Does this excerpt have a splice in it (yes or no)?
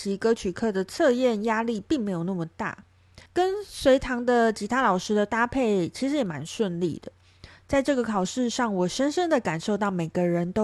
yes